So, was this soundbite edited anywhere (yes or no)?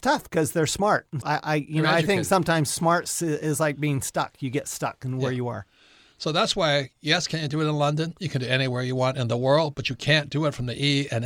yes